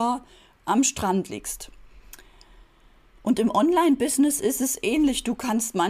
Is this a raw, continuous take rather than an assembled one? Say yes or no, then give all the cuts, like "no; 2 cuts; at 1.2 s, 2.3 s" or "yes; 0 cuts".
yes; 0 cuts